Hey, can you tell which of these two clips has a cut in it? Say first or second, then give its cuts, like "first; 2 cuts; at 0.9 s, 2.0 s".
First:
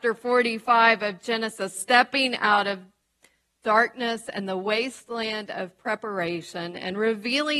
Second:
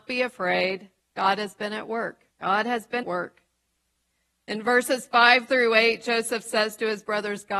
second; 3 cuts; at 1.0 s, 2.3 s, 3.0 s